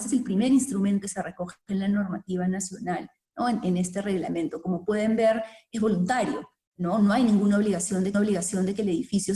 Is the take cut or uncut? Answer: cut